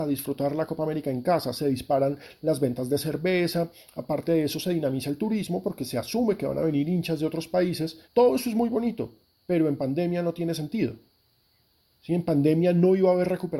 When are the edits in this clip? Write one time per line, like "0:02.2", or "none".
0:08.0